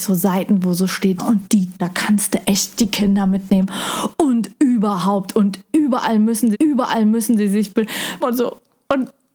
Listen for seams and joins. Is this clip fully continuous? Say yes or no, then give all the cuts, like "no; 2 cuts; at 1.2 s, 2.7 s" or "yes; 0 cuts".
no; 5 cuts; at 1.2 s, 1.8 s, 2.8 s, 6.5 s, 8.2 s